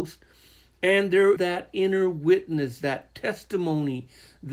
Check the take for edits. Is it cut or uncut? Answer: cut